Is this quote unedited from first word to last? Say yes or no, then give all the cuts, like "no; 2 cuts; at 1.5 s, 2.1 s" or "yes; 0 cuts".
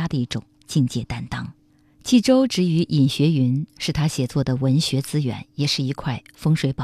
yes; 0 cuts